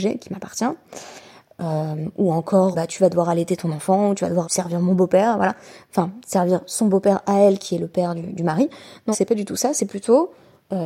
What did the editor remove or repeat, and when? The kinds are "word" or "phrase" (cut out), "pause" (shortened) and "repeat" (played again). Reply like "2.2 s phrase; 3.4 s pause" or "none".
2.7 s word; 4.4 s word; 9.1 s word